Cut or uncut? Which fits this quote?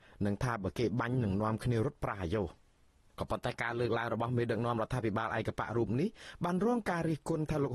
uncut